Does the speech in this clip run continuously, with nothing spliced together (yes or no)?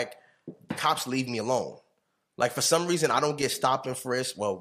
yes